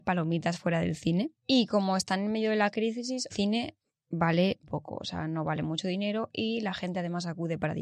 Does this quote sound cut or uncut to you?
cut